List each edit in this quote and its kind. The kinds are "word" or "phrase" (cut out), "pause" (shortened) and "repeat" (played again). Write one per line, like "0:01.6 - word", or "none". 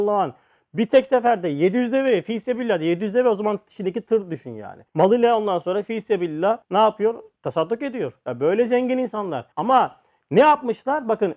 0:04.9 - pause
0:06.6 - pause
0:09.5 - pause